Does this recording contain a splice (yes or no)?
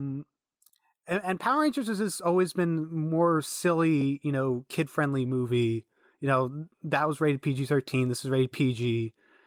no